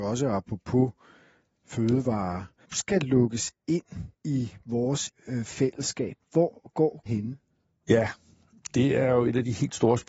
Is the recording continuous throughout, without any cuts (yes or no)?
no